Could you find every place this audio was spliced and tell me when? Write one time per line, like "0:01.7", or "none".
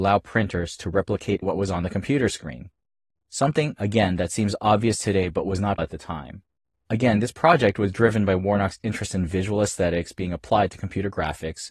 0:01.4
0:05.8